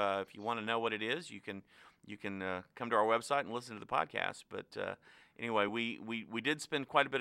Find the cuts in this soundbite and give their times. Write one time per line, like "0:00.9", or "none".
none